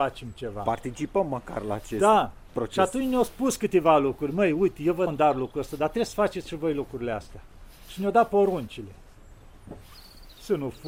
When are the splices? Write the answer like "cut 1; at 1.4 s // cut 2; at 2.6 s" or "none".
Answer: cut 1; at 5.1 s